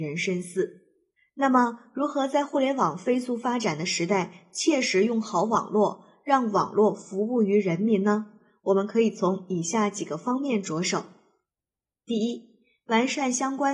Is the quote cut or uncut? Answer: cut